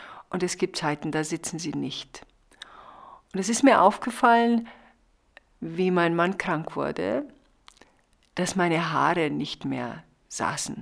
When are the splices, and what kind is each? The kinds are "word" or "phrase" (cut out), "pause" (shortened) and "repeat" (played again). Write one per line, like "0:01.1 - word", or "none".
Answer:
none